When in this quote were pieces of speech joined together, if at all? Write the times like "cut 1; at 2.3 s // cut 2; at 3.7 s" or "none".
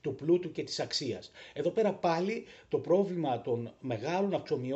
none